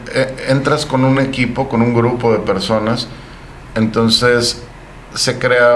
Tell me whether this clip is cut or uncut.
uncut